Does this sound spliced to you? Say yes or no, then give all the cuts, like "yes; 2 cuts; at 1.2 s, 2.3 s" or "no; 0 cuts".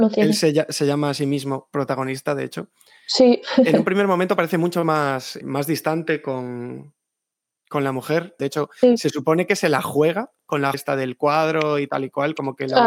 yes; 2 cuts; at 5.4 s, 10.7 s